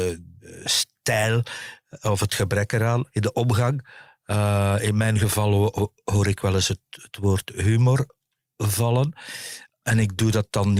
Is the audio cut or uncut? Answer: uncut